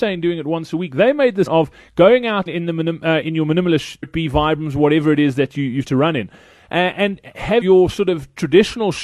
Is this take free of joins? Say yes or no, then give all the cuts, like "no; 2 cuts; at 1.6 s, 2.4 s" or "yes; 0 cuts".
no; 6 cuts; at 1.5 s, 2.5 s, 3.2 s, 4.0 s, 5.9 s, 7.6 s